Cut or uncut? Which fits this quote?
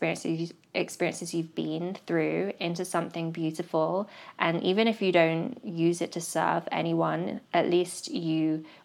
cut